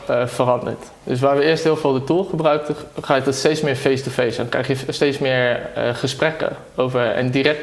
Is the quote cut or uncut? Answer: uncut